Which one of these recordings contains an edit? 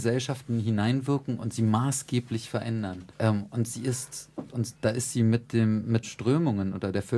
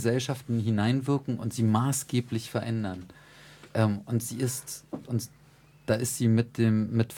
first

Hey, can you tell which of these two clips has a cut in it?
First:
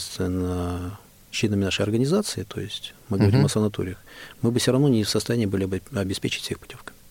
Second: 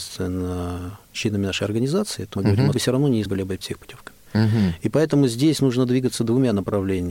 second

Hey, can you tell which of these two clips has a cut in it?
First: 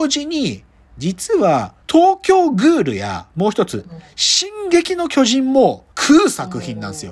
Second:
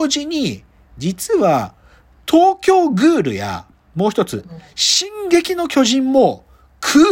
first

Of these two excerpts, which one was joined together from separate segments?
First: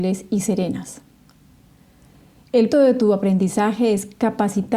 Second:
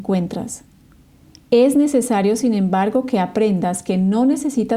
first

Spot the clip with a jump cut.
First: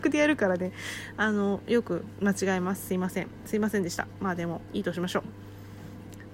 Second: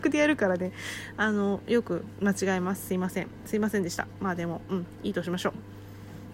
first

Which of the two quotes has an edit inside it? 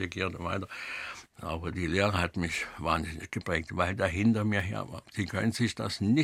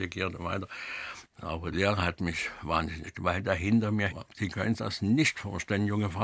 second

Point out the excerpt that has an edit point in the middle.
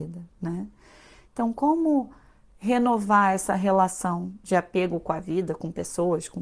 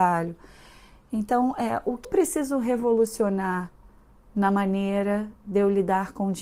second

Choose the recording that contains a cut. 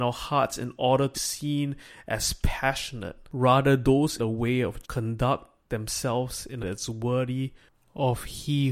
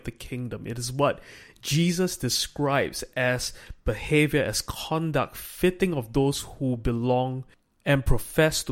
first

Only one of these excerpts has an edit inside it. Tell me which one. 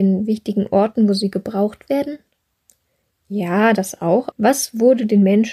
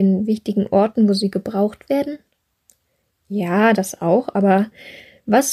first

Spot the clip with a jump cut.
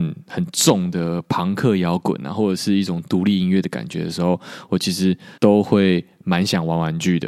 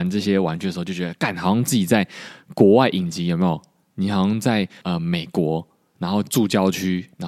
first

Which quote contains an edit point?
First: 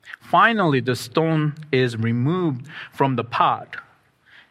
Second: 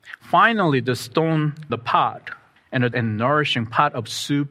second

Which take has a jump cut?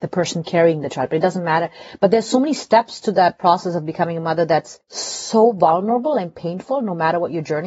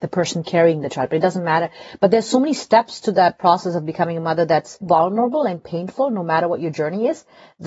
second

